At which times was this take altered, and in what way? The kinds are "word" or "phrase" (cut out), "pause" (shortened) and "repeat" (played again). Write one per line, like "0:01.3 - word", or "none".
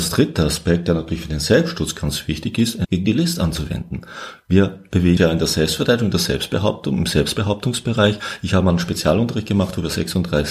0:02.8 - word
0:05.2 - word